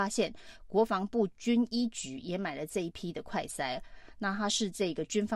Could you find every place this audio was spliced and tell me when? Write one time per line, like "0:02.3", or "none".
none